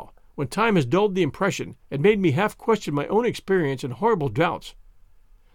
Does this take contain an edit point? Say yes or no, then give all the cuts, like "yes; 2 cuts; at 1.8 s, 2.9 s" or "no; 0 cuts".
yes; 1 cut; at 1.8 s